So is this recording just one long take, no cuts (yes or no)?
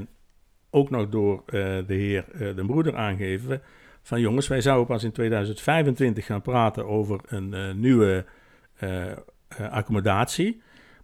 yes